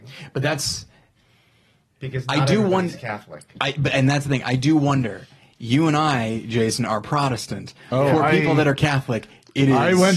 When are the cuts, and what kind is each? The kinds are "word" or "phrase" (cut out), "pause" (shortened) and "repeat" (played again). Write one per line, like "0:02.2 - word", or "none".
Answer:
none